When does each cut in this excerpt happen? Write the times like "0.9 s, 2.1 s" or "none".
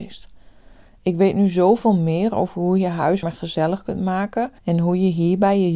3.2 s, 4.6 s